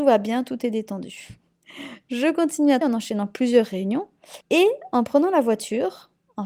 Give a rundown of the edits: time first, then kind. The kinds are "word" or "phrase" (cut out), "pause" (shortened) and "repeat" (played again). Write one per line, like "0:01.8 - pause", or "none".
0:02.8 - phrase
0:04.4 - pause